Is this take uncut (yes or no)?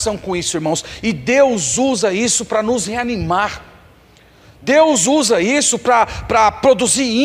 yes